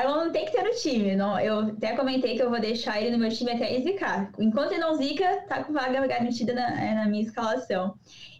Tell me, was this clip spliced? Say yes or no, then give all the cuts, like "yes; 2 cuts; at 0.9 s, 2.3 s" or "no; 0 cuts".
no; 0 cuts